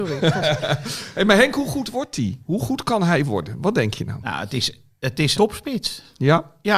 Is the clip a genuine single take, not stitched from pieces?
no; 1 cut; at 5.3 s

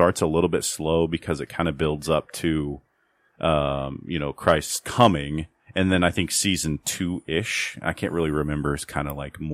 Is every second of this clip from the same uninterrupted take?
yes; 0 cuts

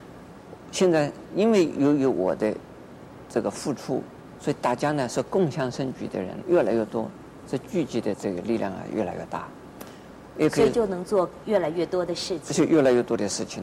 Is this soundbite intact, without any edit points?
no; 1 cut; at 6.4 s

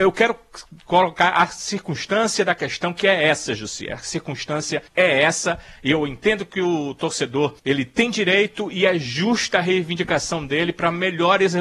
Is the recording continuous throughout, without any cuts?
no; 2 cuts; at 4.9 s, 7.6 s

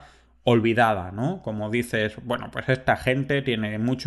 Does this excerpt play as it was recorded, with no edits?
yes; 0 cuts

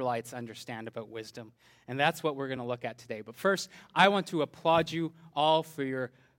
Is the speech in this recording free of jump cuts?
yes; 0 cuts

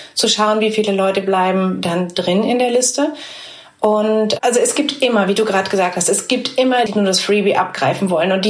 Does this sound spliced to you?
yes; 1 cut; at 6.9 s

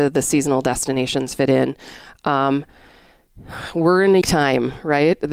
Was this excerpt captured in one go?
no; 1 cut; at 4.2 s

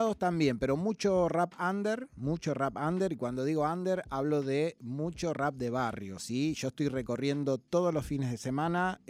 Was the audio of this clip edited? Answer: no; 0 cuts

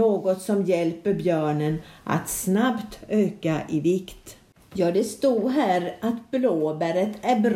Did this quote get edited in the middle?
no; 0 cuts

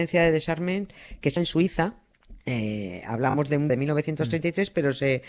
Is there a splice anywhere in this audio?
yes; 3 cuts; at 1.4 s, 2.4 s, 3.7 s

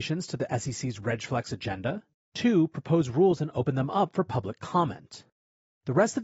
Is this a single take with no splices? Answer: no; 1 cut; at 2.1 s

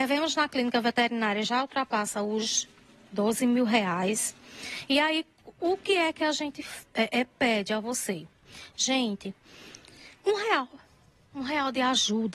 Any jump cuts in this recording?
no; 0 cuts

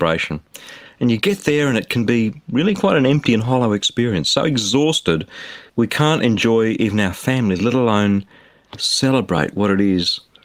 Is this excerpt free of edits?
no; 1 cut; at 5.7 s

